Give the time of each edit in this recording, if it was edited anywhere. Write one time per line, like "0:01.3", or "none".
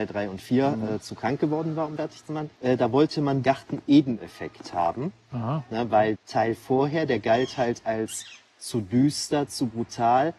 0:02.0
0:02.5
0:03.4
0:06.1